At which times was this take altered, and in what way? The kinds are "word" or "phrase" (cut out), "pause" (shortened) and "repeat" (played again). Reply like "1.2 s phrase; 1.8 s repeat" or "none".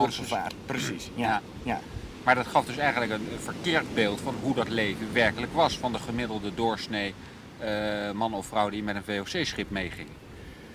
none